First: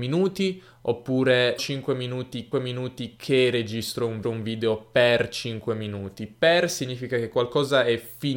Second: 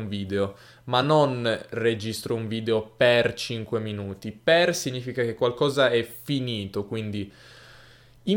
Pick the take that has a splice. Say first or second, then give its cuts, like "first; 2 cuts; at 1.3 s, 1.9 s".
first; 3 cuts; at 1.6 s, 2.5 s, 4.2 s